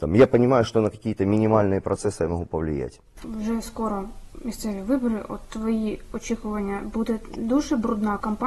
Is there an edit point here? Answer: no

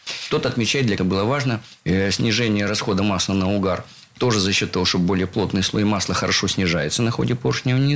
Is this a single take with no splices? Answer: no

